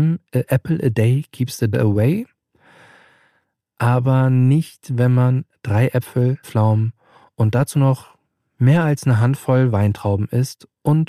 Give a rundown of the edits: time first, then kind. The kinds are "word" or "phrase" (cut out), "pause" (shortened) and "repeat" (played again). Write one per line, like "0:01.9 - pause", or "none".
0:01.7 - word
0:06.4 - word